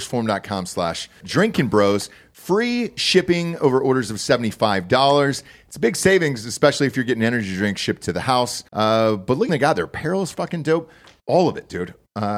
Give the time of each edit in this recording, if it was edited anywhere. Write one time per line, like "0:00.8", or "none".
0:01.2
0:08.7
0:09.5